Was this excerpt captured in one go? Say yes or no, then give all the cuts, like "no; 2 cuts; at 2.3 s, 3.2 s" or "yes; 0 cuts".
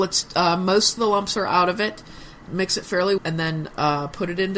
no; 3 cuts; at 1.0 s, 2.5 s, 3.2 s